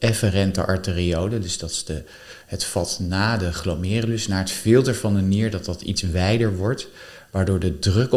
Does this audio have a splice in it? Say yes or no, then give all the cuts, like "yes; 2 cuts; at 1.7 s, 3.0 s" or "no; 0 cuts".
yes; 1 cut; at 2.4 s